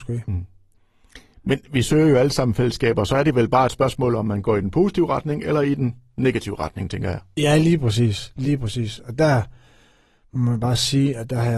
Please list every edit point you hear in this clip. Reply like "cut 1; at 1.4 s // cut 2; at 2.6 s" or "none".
none